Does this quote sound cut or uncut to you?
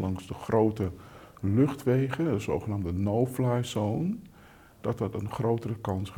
uncut